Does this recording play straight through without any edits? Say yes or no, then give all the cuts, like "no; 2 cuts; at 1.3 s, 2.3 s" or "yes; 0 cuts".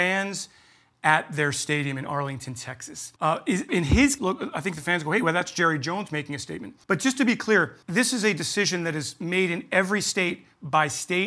no; 5 cuts; at 3.2 s, 3.7 s, 4.2 s, 6.8 s, 7.8 s